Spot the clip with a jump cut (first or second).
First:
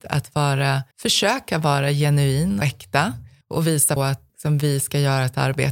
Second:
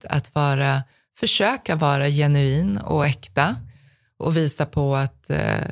first